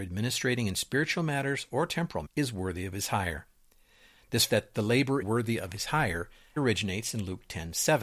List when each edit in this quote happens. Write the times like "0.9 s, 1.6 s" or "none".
2.3 s, 4.5 s, 5.2 s, 6.6 s